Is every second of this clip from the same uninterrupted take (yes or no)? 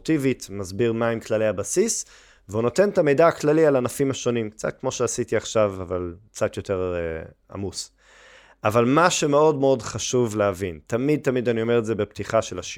yes